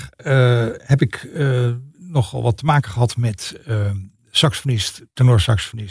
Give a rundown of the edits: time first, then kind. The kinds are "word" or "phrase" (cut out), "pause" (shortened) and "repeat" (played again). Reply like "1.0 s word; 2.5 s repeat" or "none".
none